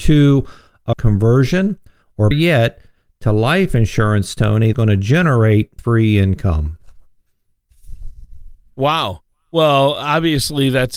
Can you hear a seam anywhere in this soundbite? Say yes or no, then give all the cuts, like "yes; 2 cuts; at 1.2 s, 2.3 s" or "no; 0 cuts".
yes; 4 cuts; at 0.9 s, 2.3 s, 4.7 s, 5.8 s